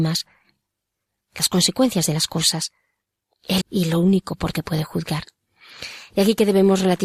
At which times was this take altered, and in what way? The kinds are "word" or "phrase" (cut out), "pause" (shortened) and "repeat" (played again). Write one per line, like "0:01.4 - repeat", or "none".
0:03.6 - phrase
0:04.5 - word